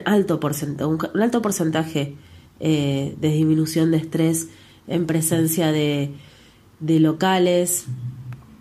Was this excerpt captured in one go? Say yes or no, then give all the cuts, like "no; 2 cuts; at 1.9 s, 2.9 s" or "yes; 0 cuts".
yes; 0 cuts